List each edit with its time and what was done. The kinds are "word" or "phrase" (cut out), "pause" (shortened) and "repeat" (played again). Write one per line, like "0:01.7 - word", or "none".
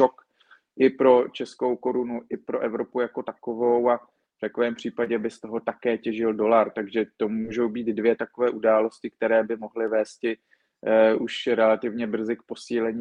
none